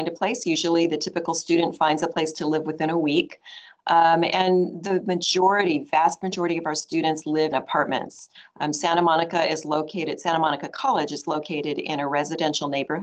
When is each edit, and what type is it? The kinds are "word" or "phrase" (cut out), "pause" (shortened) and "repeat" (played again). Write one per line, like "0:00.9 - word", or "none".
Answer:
0:07.5 - word